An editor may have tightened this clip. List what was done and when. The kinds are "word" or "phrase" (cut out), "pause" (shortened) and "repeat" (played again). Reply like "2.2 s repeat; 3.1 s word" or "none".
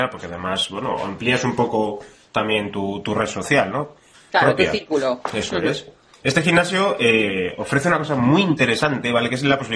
none